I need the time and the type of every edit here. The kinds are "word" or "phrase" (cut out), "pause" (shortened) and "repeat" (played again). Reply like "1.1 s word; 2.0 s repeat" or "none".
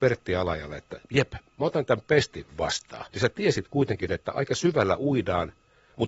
1.0 s pause; 3.1 s pause